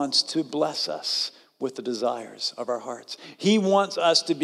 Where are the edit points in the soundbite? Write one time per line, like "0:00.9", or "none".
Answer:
none